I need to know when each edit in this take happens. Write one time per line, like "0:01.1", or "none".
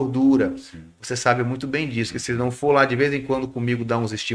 none